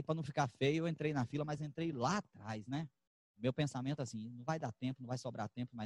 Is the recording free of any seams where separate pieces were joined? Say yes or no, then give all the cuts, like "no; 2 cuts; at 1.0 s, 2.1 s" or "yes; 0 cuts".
yes; 0 cuts